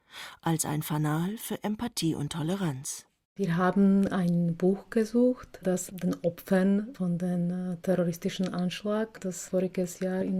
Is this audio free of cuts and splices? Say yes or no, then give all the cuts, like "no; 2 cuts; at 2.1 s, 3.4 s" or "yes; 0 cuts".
yes; 0 cuts